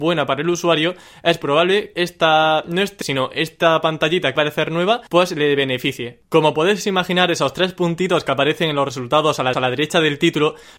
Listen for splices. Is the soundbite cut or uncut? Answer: cut